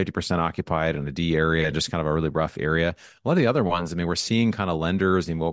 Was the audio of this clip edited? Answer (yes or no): no